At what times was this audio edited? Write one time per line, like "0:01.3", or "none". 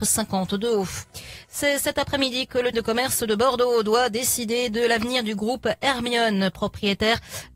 0:02.7